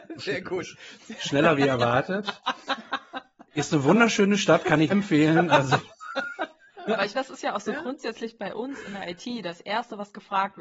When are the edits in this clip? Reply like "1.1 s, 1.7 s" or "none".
4.9 s, 7.1 s